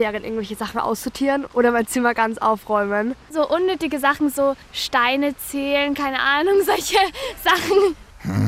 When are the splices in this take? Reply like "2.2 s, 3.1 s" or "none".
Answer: none